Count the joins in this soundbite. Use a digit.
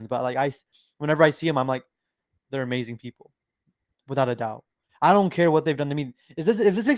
0